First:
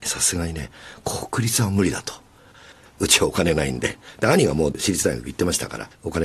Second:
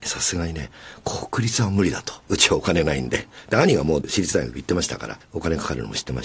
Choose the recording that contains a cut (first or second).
second